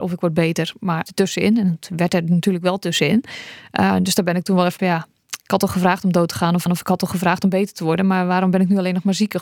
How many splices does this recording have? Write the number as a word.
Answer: three